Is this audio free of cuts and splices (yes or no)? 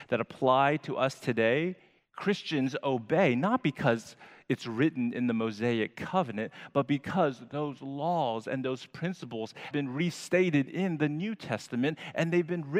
no